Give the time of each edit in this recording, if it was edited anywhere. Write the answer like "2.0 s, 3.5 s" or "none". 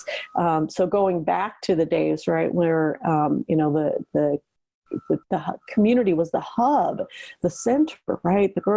5.2 s